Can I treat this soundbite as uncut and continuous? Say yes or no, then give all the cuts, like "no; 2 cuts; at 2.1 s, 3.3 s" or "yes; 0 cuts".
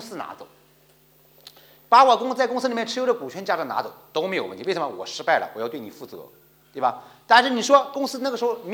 yes; 0 cuts